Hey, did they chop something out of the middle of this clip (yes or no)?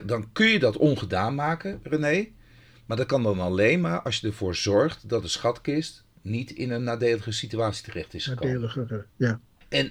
no